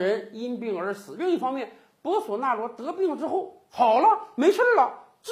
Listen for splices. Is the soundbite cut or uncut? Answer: uncut